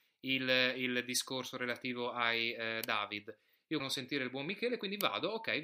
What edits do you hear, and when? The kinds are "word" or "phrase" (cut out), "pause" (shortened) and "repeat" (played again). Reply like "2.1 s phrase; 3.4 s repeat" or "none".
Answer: 3.8 s word